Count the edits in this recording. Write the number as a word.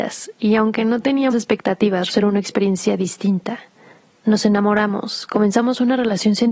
three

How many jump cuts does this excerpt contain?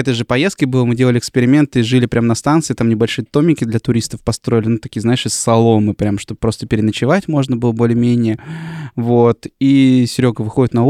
zero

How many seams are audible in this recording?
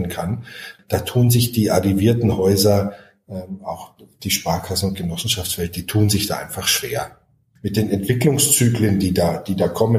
zero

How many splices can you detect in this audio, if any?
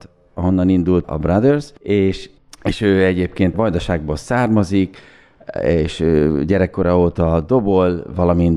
three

